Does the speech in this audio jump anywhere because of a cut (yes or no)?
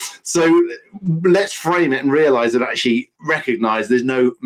no